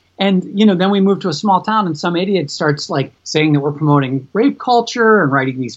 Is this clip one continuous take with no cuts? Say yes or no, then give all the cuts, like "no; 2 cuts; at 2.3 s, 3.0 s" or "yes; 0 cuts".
no; 1 cut; at 3.2 s